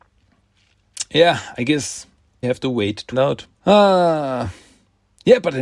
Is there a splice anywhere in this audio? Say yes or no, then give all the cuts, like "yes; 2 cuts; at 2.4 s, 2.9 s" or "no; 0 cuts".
yes; 3 cuts; at 2.4 s, 3.1 s, 3.5 s